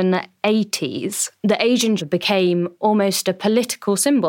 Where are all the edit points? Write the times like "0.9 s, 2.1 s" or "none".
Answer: 1.4 s, 2.0 s

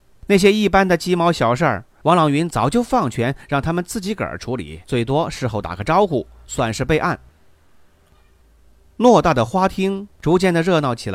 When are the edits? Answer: 4.8 s

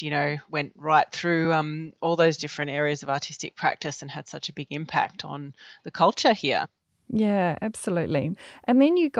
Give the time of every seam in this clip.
none

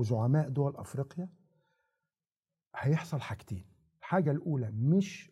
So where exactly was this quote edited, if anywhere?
none

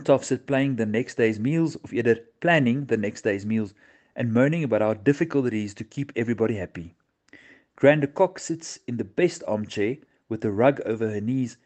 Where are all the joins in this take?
none

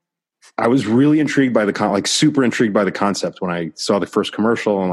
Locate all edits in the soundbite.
none

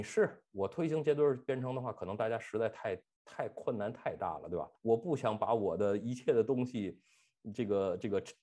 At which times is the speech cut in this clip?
4.8 s

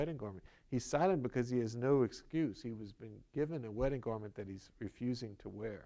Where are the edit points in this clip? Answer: none

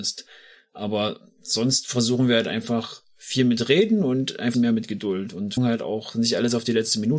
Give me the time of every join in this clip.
4.5 s, 5.6 s

